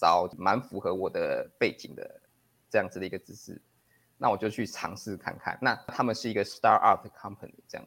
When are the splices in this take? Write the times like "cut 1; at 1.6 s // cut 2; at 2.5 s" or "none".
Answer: none